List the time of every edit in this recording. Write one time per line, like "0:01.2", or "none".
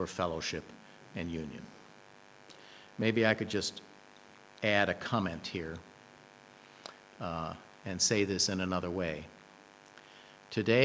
none